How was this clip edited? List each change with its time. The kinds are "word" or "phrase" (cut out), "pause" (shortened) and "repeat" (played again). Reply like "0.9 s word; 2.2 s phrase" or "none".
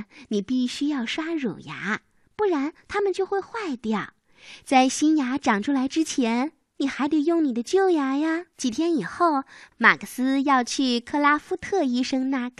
8.5 s pause